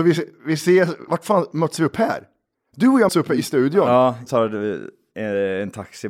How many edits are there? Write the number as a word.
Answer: three